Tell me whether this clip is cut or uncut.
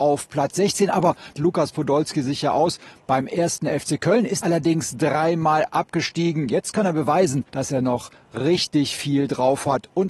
cut